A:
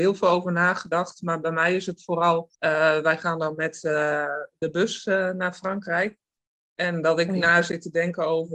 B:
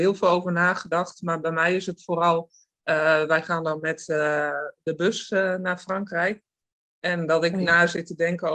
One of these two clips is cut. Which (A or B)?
A